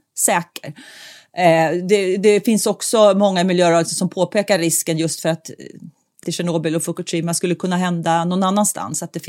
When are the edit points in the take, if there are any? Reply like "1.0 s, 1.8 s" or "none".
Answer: 6.2 s